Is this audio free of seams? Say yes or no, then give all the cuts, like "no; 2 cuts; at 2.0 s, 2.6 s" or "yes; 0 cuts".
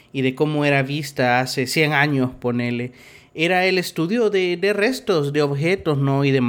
yes; 0 cuts